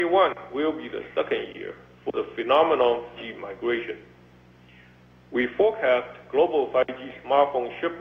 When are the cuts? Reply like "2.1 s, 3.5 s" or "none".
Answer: 3.2 s